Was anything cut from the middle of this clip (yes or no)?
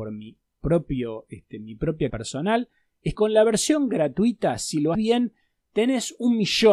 yes